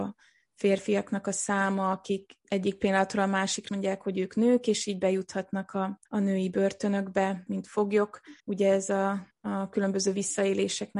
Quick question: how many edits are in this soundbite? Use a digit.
6